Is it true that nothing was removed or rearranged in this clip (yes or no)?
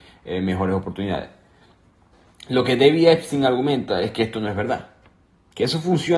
yes